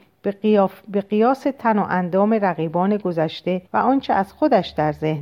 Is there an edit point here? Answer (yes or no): yes